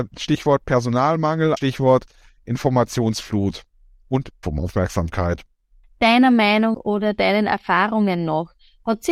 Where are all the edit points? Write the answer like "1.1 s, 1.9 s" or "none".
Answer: 1.6 s, 4.4 s, 6.7 s